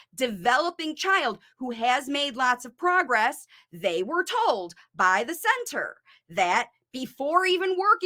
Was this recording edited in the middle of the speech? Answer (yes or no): no